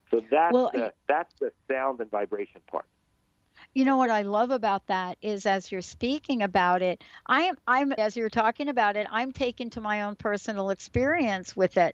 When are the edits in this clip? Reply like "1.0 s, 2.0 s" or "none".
1.0 s, 8.0 s